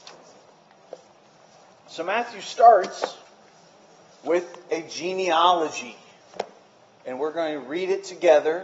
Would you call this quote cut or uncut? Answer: uncut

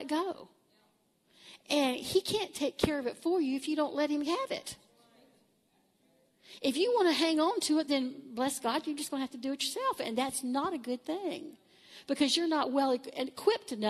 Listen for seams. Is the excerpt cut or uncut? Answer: uncut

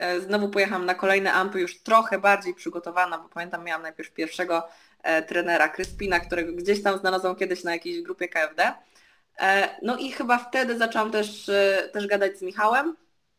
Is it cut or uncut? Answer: uncut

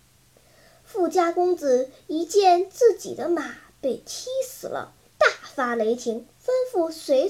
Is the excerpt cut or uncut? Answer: cut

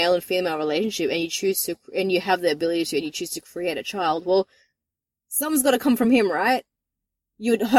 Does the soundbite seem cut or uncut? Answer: uncut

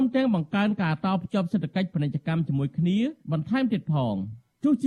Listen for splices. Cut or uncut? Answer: cut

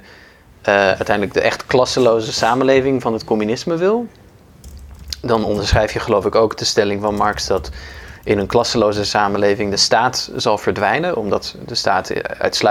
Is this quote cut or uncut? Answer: uncut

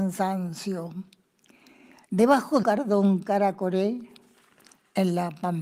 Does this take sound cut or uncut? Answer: cut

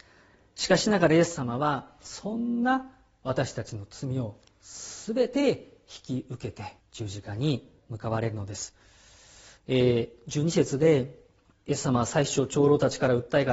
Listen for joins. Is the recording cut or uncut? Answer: cut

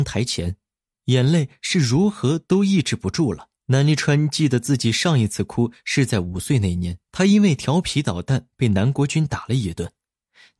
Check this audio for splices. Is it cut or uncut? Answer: cut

